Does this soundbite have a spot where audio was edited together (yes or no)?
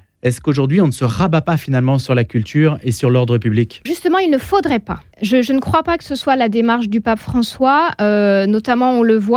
yes